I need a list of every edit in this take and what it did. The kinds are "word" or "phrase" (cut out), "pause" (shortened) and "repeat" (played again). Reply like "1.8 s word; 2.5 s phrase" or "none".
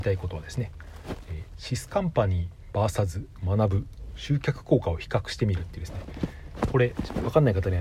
none